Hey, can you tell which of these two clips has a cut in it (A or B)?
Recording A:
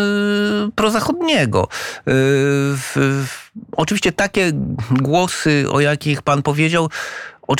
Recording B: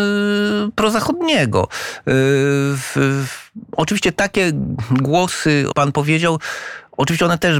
B